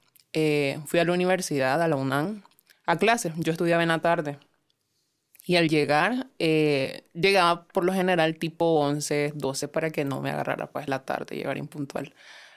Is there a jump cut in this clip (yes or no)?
yes